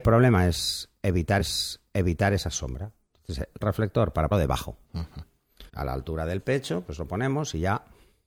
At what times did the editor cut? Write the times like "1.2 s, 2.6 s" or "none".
1.4 s, 3.6 s, 4.3 s, 4.8 s, 5.7 s